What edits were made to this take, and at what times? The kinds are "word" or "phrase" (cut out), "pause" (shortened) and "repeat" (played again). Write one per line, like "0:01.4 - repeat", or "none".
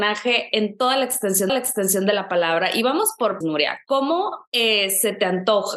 0:01.5 - repeat
0:03.4 - word